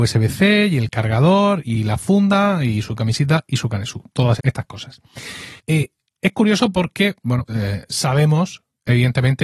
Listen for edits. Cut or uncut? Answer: cut